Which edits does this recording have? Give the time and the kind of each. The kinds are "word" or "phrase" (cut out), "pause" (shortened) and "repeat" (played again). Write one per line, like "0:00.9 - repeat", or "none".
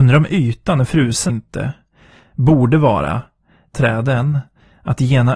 0:01.3 - word
0:03.7 - phrase

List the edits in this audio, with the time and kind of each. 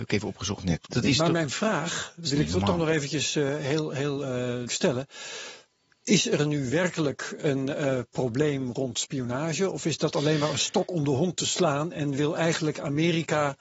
0:04.7 - word

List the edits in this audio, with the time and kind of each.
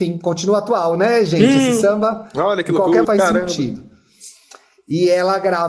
0:03.0 - phrase

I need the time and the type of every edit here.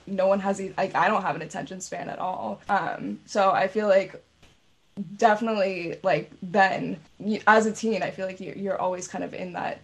0:02.6 - pause

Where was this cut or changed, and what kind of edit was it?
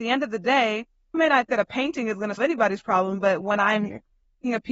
0:01.1 - word
0:01.5 - word
0:02.4 - word

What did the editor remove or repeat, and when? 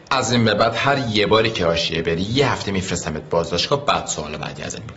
none

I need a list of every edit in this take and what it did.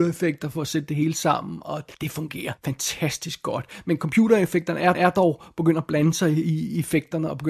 0:01.9 - pause
0:02.6 - pause
0:04.9 - repeat

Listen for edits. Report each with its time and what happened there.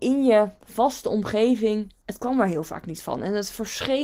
0:02.0 - pause

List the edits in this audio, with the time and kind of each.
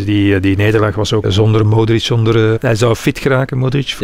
0:01.2 - word
0:02.6 - word

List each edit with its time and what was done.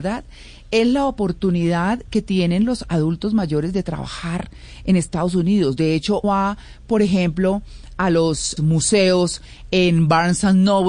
0:06.2 - word
0:08.6 - phrase

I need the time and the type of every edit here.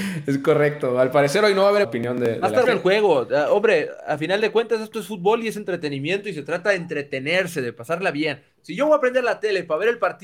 0:01.8 - phrase
0:02.7 - word

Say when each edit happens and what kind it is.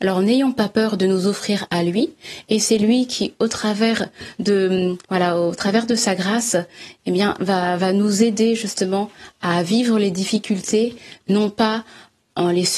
0:05.0 - pause

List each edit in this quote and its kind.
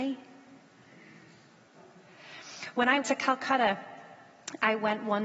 0:03.0 - word

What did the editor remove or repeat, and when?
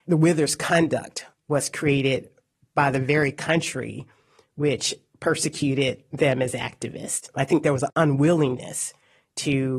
none

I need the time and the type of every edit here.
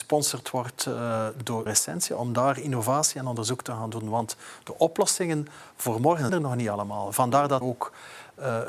0:01.7 - word
0:06.3 - word
0:07.6 - word

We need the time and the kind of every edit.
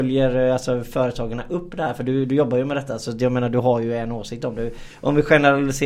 none

